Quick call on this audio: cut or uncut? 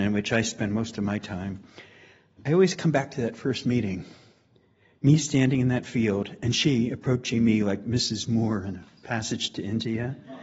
uncut